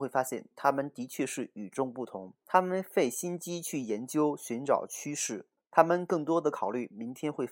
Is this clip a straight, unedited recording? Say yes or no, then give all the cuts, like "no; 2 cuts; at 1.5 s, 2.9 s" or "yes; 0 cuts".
no; 2 cuts; at 2.4 s, 5.6 s